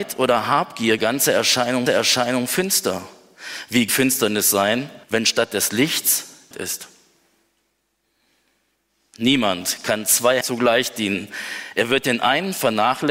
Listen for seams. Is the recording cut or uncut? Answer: cut